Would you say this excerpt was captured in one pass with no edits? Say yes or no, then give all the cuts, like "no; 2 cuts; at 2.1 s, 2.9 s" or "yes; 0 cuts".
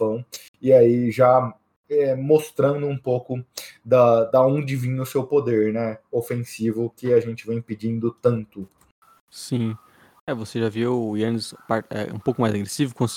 yes; 0 cuts